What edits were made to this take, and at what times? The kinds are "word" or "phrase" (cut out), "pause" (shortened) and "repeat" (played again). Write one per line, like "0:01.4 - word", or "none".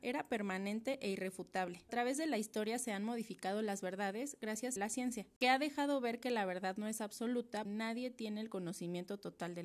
0:01.9 - phrase
0:04.8 - phrase
0:07.6 - word